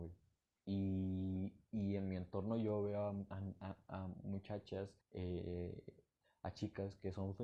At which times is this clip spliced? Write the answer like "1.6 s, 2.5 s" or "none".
5.0 s